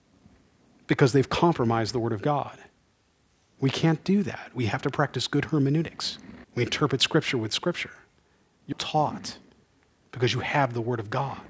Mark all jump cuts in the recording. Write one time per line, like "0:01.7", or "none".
0:06.4
0:08.7